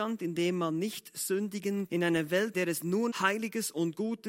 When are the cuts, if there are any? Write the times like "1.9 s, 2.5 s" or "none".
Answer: 1.9 s, 2.5 s, 3.1 s